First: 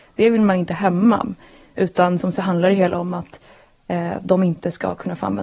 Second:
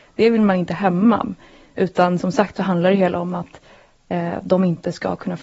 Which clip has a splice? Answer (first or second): first